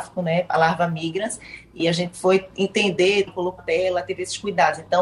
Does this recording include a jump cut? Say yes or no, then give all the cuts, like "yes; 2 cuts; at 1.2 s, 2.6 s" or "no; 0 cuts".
yes; 3 cuts; at 1.8 s, 3.3 s, 3.6 s